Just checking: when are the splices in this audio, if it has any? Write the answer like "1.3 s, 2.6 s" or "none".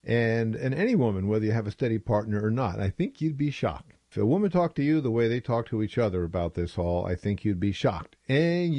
4.1 s